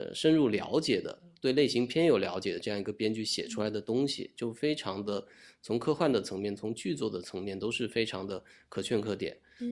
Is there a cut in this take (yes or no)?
no